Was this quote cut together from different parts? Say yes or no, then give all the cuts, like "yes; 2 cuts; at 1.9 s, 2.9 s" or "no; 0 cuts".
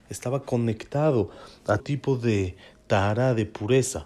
yes; 1 cut; at 1.8 s